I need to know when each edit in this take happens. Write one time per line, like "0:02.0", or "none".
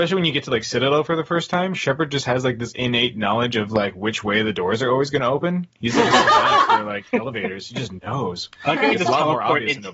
0:08.6